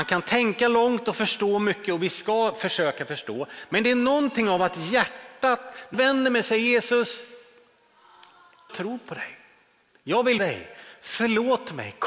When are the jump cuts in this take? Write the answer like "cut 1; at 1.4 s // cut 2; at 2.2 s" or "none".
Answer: cut 1; at 5.9 s // cut 2; at 8.7 s // cut 3; at 10.4 s